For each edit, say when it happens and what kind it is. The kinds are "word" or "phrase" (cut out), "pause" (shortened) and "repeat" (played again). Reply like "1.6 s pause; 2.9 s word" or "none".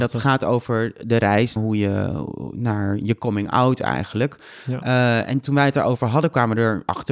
1.6 s word